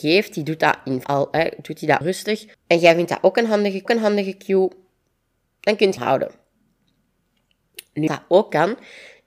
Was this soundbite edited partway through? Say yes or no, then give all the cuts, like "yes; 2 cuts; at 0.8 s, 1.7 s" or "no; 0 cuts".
yes; 6 cuts; at 1.0 s, 2.0 s, 2.5 s, 3.9 s, 6.0 s, 8.1 s